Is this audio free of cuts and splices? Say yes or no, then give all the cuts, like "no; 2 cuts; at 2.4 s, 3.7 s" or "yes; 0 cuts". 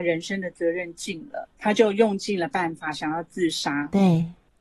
no; 1 cut; at 1.5 s